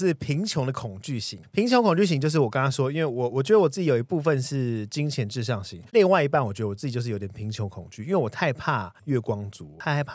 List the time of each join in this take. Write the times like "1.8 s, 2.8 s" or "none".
5.9 s